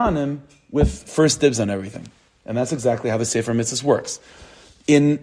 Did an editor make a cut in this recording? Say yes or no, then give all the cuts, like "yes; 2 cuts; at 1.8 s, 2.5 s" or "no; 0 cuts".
no; 0 cuts